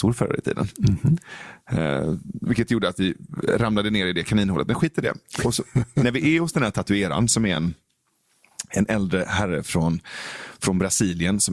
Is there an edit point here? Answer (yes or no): no